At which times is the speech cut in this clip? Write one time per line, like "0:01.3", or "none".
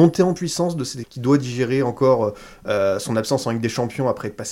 0:01.0